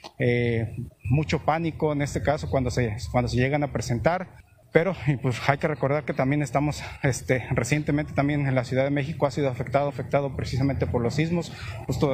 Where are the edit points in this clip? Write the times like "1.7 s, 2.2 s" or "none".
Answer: 9.9 s